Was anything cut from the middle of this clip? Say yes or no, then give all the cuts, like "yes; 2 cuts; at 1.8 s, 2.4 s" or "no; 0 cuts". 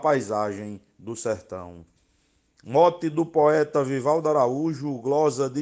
no; 0 cuts